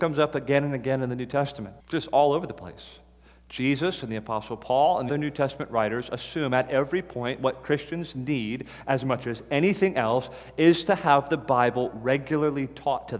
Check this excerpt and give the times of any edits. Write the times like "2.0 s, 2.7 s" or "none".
1.8 s, 5.1 s